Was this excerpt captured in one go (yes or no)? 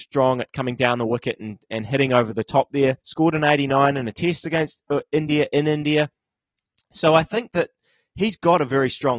no